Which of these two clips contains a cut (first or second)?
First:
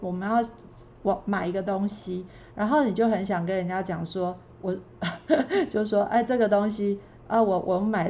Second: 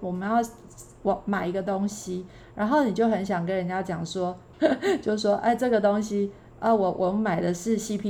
second